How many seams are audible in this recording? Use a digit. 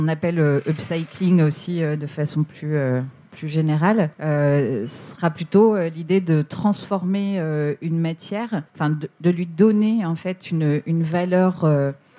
2